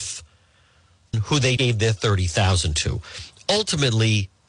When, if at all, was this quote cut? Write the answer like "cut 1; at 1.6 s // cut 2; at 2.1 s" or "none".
cut 1; at 1.1 s // cut 2; at 1.6 s